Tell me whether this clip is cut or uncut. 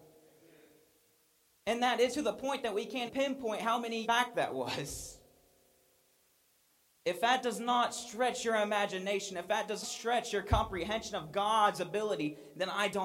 cut